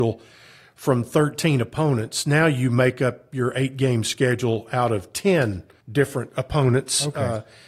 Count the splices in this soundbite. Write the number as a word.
one